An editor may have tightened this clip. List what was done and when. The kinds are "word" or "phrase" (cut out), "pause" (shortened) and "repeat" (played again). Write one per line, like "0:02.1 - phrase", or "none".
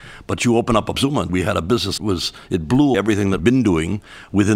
0:00.9 - word
0:01.3 - word
0:02.0 - word
0:02.9 - word
0:03.4 - word